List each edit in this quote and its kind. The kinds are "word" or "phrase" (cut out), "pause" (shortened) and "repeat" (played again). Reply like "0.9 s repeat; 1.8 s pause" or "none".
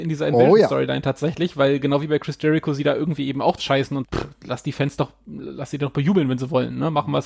3.6 s word; 4.0 s word